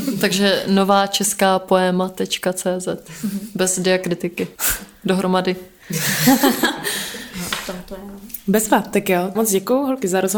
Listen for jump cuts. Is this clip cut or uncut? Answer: cut